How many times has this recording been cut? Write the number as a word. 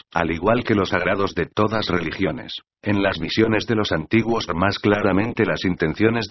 four